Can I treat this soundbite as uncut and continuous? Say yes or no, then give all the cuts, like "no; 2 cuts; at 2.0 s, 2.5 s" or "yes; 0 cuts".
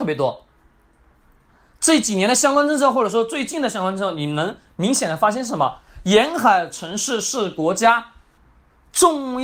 yes; 0 cuts